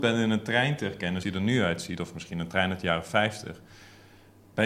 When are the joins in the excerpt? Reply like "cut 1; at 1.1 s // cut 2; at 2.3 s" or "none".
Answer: cut 1; at 1.2 s

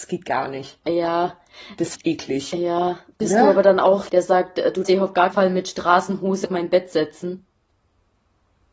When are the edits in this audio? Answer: cut 1; at 1.9 s // cut 2; at 4.1 s // cut 3; at 4.8 s // cut 4; at 5.3 s // cut 5; at 6.4 s

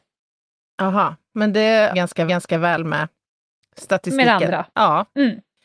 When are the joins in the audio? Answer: cut 1; at 1.3 s // cut 2; at 1.9 s // cut 3; at 2.3 s // cut 4; at 3.3 s // cut 5; at 4.7 s

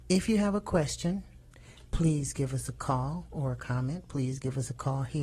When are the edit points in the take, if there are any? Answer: none

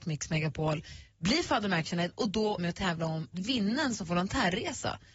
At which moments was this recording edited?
cut 1; at 2.6 s // cut 2; at 3.3 s // cut 3; at 4.0 s

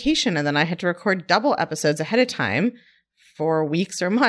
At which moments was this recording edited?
none

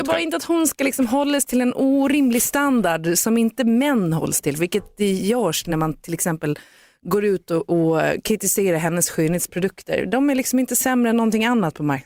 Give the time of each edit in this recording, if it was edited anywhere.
none

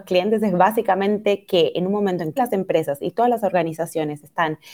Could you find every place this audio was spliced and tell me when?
cut 1; at 2.4 s

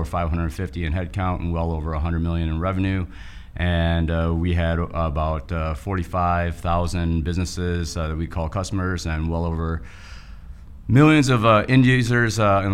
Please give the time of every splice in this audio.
none

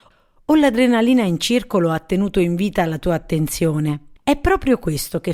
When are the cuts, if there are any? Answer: cut 1; at 4.2 s

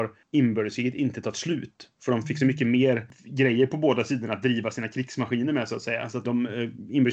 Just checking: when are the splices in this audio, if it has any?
cut 1; at 6.2 s

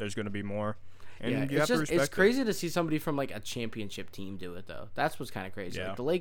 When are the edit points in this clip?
none

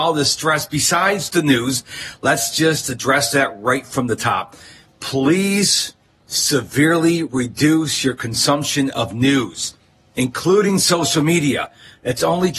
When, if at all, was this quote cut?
none

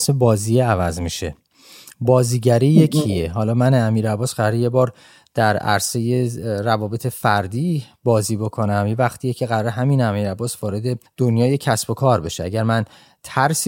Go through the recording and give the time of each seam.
cut 1; at 11.0 s

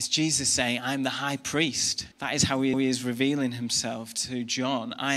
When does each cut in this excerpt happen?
cut 1; at 2.1 s // cut 2; at 2.7 s

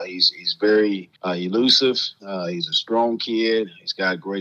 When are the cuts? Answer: cut 1; at 1.2 s

